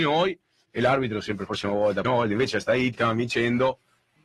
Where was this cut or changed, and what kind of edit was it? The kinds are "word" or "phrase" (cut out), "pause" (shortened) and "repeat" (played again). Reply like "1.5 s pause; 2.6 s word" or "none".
1.5 s phrase; 2.0 s word; 2.9 s word